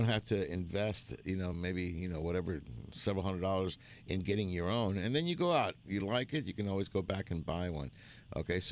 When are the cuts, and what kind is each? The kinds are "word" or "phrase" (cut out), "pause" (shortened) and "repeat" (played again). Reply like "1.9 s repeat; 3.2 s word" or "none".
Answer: none